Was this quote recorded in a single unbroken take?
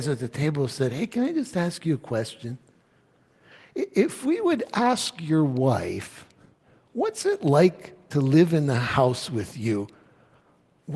yes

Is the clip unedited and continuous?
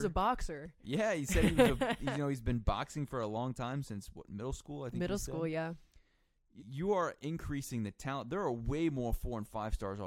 no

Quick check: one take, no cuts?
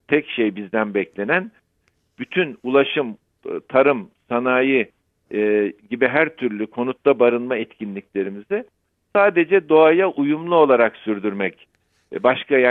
yes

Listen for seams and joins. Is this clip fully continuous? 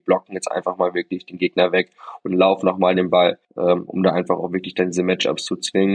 no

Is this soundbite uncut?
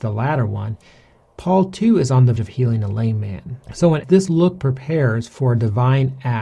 no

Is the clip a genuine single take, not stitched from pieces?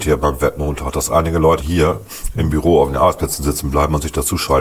no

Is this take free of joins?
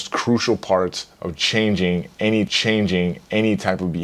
no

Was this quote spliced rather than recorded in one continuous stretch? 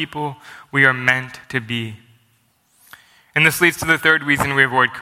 yes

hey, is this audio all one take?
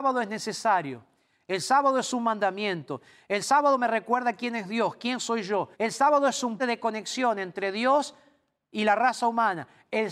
no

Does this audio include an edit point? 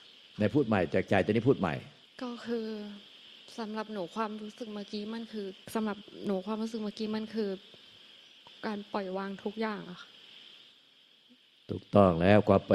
yes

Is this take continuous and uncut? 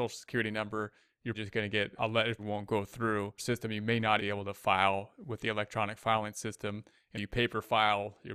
no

